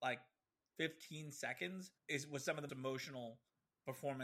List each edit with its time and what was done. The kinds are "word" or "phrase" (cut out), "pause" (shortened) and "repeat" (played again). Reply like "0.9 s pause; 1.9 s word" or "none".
2.0 s pause; 2.7 s word

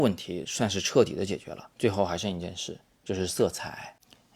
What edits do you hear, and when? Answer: 1.7 s pause

